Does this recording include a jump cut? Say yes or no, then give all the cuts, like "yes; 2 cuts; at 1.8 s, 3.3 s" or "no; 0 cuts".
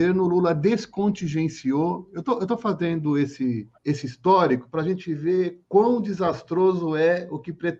yes; 2 cuts; at 3.8 s, 5.6 s